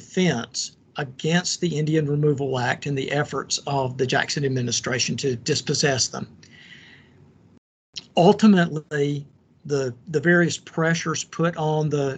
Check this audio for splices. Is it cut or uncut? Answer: uncut